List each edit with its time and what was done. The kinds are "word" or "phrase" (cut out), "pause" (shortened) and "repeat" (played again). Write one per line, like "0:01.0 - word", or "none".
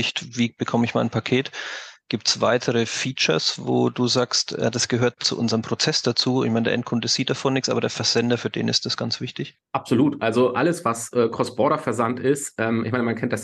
0:09.6 - pause